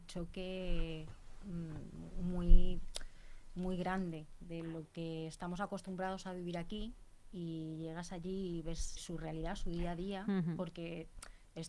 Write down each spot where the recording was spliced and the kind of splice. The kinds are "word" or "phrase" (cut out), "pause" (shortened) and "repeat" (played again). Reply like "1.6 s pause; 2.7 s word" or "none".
9.0 s word